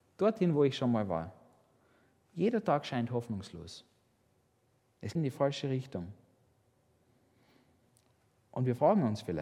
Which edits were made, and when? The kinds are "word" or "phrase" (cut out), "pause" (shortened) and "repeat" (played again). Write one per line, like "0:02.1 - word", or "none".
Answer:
0:05.2 - word